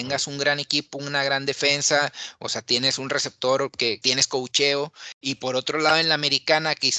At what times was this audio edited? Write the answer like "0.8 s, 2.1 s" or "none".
4.0 s